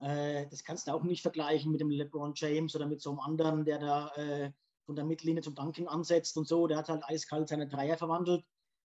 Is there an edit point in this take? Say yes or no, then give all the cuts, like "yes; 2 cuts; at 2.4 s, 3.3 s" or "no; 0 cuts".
no; 0 cuts